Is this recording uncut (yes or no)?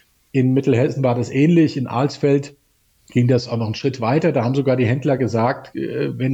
yes